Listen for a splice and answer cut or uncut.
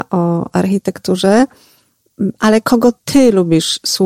uncut